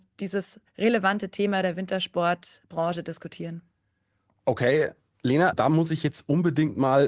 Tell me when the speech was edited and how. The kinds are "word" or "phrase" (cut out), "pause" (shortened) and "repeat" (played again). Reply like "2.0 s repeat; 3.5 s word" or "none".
5.5 s word